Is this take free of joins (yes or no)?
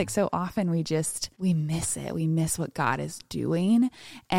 no